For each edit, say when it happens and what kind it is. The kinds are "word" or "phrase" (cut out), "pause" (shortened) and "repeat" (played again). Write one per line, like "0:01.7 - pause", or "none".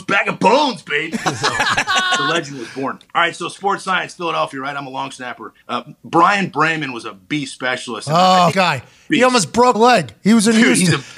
0:01.1 - word
0:03.1 - pause
0:05.6 - pause
0:08.5 - phrase
0:09.7 - word